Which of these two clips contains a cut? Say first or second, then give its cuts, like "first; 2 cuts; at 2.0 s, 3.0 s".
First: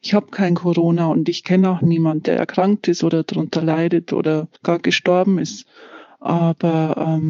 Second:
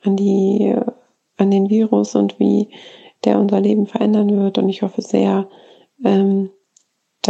first; 1 cut; at 4.5 s